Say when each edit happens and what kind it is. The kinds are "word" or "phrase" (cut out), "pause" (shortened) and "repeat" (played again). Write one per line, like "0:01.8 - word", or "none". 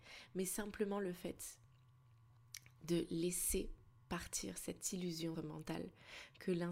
0:04.0 - pause
0:05.3 - phrase